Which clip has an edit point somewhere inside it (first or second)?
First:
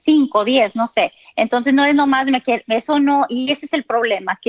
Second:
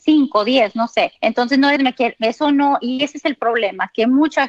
second